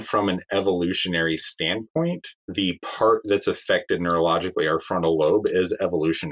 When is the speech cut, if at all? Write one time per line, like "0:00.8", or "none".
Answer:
0:02.4